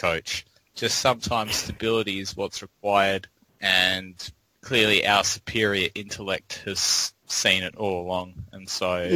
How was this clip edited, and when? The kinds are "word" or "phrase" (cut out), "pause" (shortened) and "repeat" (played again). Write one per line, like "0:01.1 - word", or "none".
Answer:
none